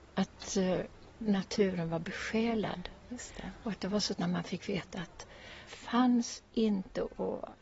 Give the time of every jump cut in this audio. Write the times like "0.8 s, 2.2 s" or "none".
4.1 s, 5.7 s